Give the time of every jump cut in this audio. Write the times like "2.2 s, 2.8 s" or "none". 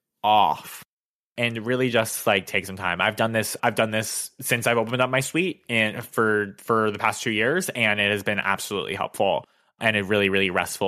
none